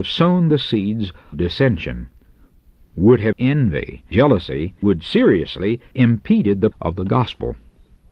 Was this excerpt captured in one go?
no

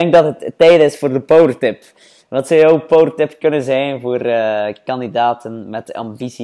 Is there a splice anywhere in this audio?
no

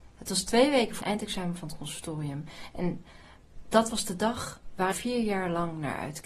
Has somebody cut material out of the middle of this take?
yes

